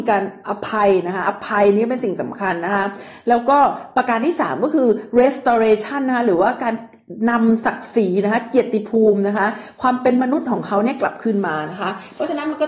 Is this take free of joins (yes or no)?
yes